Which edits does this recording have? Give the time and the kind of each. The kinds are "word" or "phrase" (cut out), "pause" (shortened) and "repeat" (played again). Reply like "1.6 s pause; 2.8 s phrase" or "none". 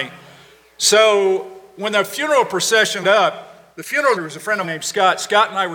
3.0 s word; 4.2 s word; 4.6 s word

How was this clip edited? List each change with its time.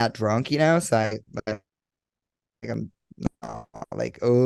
none

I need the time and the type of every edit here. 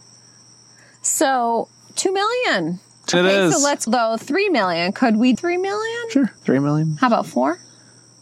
3.1 s word; 3.9 s word; 5.3 s phrase; 6.4 s pause

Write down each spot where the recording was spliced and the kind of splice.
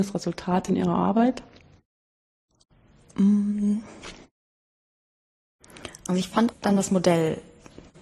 6.5 s word

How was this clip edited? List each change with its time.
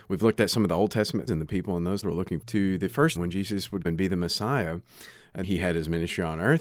1.3 s word; 2.0 s word; 2.4 s word; 3.1 s word; 3.8 s word; 5.4 s word

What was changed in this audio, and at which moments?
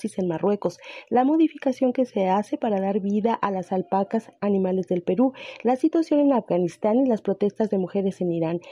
none

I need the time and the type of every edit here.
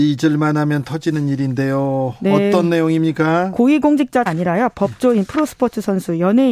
4.3 s word

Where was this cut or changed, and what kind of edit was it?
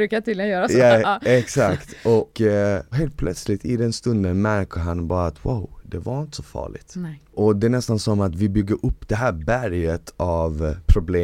2.3 s word

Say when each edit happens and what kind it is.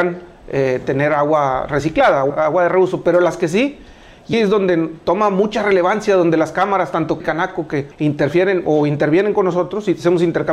2.3 s word; 4.3 s word; 7.2 s word; 7.9 s pause

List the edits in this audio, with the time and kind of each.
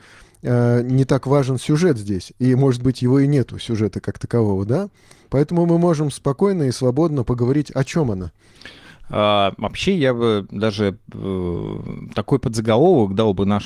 none

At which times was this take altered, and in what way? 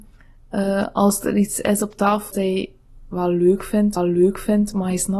2.3 s word; 4.0 s repeat

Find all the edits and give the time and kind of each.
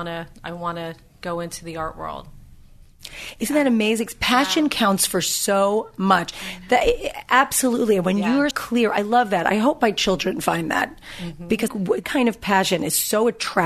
8.5 s word; 11.7 s phrase; 12.0 s word

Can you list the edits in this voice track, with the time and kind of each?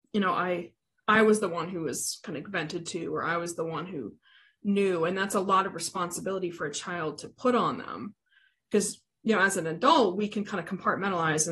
none

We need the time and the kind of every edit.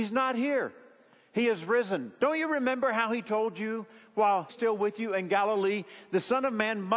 4.5 s phrase

